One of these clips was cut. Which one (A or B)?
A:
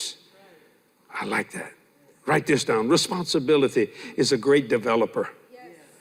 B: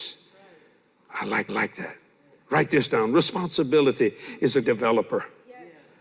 B